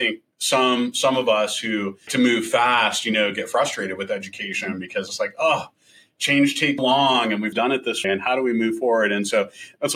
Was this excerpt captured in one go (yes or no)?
no